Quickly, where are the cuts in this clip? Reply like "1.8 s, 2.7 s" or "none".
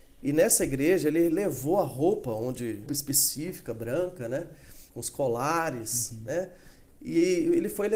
2.9 s, 4.9 s